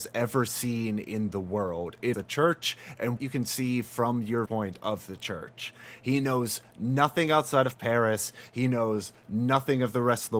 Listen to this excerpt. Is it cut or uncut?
cut